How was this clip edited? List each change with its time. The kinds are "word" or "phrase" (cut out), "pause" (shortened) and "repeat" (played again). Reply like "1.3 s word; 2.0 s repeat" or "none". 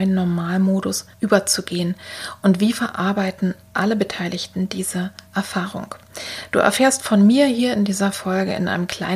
1.1 s pause; 5.3 s pause